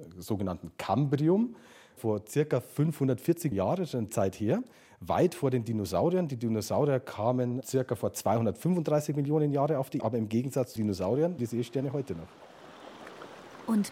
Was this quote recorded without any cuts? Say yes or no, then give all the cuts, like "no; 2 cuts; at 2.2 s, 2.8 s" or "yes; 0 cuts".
no; 5 cuts; at 3.5 s, 4.1 s, 10.0 s, 10.8 s, 11.4 s